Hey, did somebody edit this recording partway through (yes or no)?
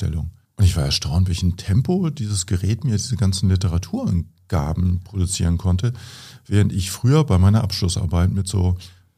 no